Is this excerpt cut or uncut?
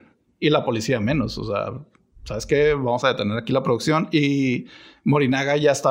uncut